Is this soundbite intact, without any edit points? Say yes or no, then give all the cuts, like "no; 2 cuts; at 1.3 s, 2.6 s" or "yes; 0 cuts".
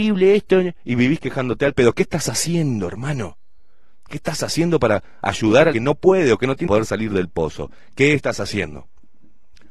no; 2 cuts; at 5.7 s, 6.7 s